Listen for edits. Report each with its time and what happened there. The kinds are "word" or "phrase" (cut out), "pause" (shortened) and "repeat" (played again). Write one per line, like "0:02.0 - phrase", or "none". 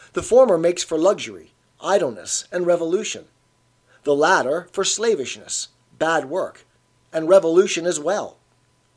none